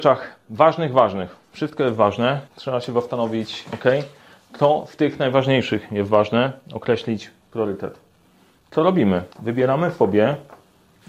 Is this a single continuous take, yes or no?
no